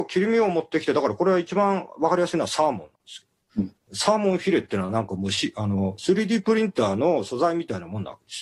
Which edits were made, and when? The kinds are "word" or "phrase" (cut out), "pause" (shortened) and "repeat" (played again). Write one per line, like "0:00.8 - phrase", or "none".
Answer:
0:02.9 - pause
0:03.8 - pause